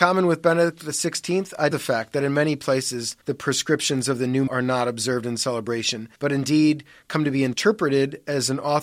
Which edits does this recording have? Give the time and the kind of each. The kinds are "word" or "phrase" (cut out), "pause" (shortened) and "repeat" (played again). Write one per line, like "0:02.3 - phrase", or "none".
0:01.7 - word
0:03.2 - pause
0:04.5 - word
0:06.2 - pause